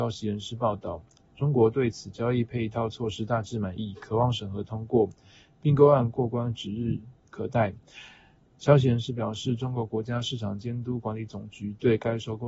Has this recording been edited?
no; 0 cuts

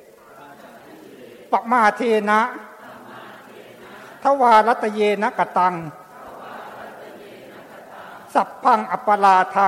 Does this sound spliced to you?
no; 0 cuts

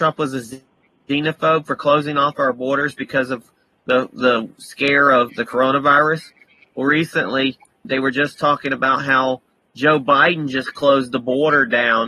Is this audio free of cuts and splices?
no; 2 cuts; at 5.3 s, 7.8 s

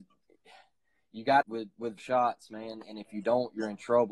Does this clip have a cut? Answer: yes; 2 cuts; at 1.4 s, 2.0 s

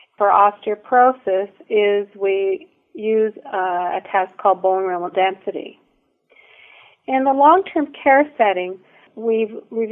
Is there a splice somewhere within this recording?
yes; 1 cut; at 5.1 s

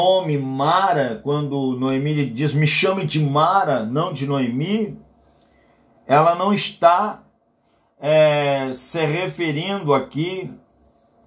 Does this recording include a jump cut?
no; 0 cuts

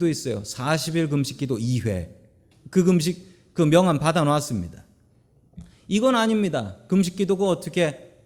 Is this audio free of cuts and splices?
yes; 0 cuts

